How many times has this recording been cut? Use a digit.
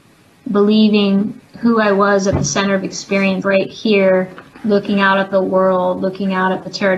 2